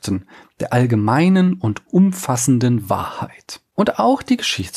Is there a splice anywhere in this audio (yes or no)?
no